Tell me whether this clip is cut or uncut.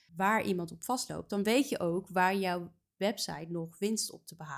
uncut